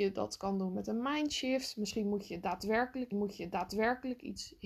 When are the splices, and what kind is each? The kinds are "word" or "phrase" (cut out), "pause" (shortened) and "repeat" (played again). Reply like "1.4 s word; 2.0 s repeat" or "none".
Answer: 3.1 s repeat